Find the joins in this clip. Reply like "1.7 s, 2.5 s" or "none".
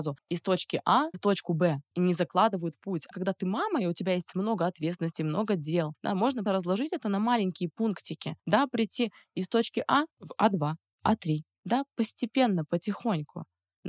1.1 s, 3.1 s, 6.5 s, 10.1 s, 10.9 s